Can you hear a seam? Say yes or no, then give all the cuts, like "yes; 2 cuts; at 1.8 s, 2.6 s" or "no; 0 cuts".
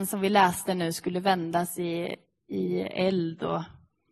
no; 0 cuts